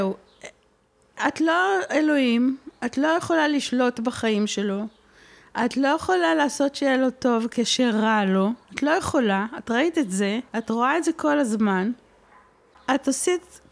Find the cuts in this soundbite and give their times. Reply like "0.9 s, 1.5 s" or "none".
8.6 s, 10.5 s